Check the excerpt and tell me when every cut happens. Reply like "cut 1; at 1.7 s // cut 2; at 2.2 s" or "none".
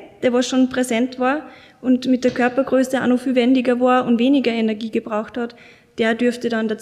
none